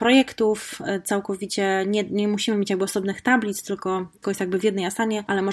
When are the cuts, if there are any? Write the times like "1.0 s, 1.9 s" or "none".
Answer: 4.2 s